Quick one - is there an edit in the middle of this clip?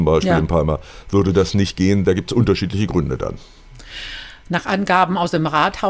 no; 0 cuts

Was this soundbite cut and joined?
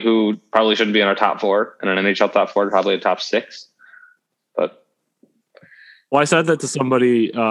no; 0 cuts

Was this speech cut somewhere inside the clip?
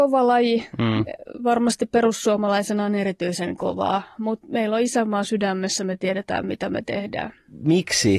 no; 0 cuts

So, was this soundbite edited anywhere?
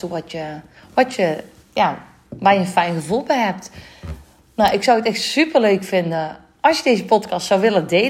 no; 0 cuts

